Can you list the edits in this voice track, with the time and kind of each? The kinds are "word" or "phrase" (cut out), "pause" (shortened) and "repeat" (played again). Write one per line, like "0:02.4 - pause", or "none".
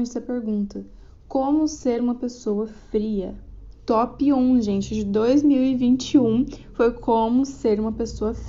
none